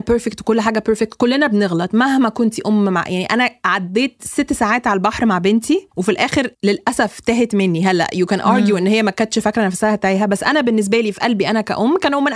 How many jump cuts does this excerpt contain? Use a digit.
2